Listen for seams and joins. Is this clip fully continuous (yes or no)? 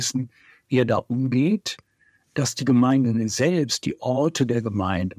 yes